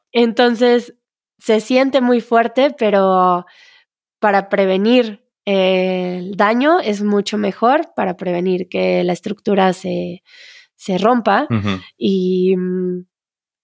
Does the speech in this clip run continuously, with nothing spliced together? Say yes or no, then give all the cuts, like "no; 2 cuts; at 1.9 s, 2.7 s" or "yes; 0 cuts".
yes; 0 cuts